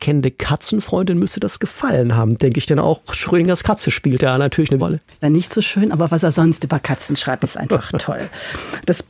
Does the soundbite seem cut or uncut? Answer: cut